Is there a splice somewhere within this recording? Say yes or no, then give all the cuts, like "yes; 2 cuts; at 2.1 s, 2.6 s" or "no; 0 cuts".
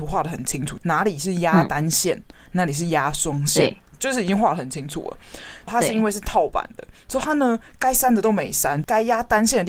no; 0 cuts